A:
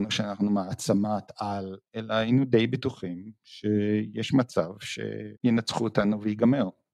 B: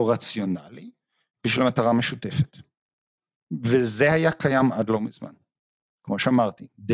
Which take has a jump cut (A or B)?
A